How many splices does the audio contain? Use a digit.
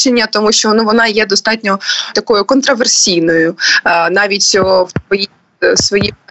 1